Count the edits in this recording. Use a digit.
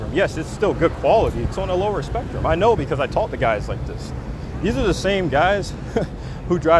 1